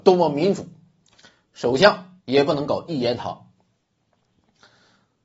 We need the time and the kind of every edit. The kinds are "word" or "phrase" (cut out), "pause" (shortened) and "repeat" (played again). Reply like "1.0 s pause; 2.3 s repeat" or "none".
2.2 s pause